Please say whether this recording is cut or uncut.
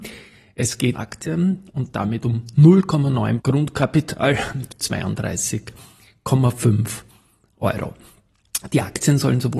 cut